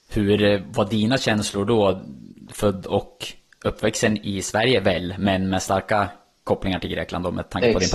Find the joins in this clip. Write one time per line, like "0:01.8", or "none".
none